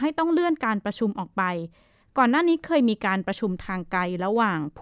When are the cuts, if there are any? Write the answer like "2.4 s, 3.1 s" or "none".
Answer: none